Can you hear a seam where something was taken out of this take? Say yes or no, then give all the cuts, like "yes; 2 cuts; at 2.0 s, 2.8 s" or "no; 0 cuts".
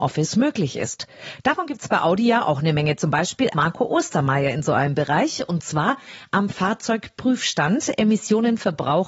yes; 1 cut; at 3.5 s